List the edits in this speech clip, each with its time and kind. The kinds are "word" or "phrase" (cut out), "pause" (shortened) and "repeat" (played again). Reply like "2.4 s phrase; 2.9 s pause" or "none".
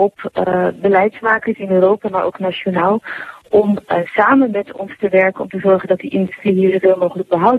none